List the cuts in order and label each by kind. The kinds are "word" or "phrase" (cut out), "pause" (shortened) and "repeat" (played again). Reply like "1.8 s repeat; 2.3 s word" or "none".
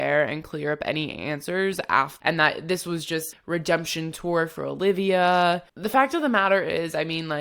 3.3 s word